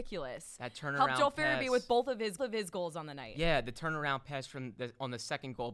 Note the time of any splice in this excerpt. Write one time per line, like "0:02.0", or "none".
0:02.4